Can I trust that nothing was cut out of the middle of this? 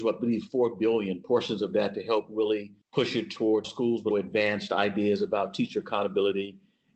no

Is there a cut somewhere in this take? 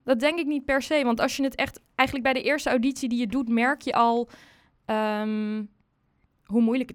no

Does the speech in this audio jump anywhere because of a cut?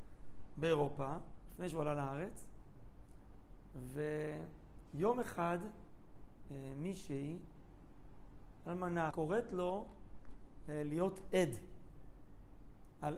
yes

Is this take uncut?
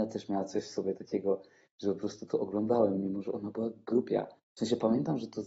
yes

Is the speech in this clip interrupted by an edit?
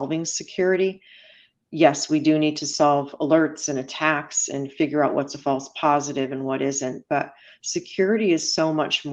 no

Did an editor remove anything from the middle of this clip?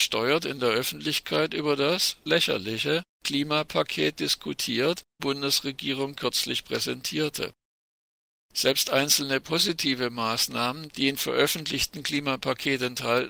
yes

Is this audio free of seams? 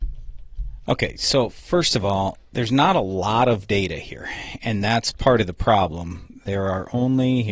yes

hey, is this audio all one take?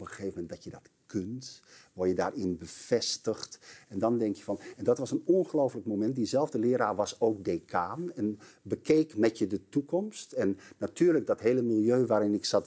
yes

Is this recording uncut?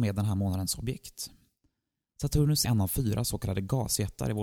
no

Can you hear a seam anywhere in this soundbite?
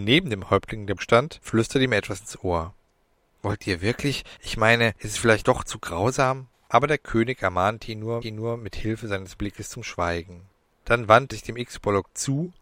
yes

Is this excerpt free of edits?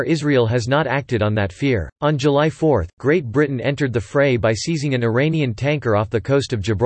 no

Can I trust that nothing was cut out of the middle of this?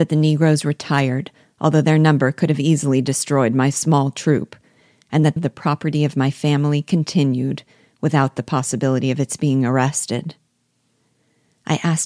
no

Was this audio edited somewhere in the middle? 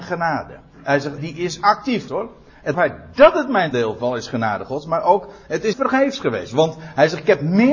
yes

